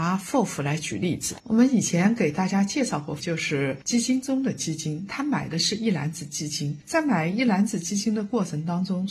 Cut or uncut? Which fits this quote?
cut